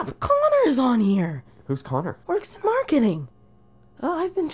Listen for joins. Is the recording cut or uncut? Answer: cut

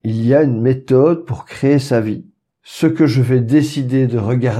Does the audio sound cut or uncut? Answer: uncut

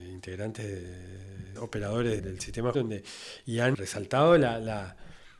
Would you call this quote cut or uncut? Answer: cut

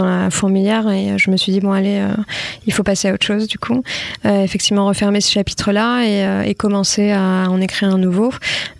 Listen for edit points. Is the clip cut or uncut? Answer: uncut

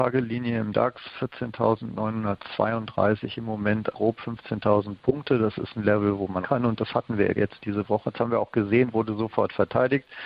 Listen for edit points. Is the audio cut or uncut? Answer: cut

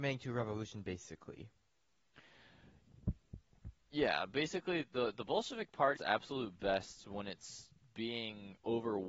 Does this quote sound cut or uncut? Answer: cut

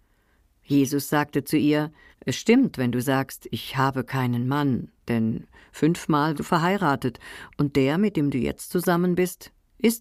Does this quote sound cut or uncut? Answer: cut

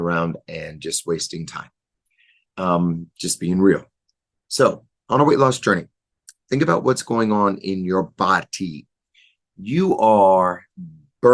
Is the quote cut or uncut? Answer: uncut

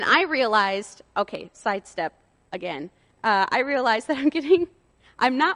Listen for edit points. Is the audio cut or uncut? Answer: uncut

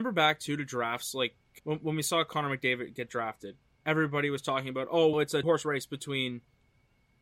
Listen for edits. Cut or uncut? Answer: cut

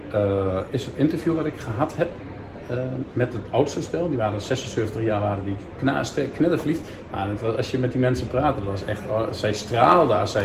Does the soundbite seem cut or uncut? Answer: uncut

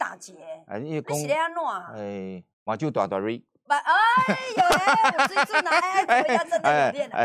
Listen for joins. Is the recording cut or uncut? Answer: cut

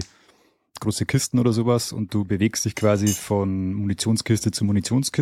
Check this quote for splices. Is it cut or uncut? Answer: uncut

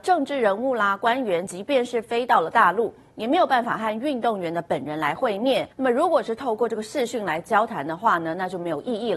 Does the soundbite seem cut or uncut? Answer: cut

